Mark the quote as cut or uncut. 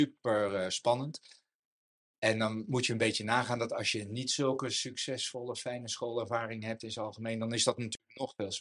uncut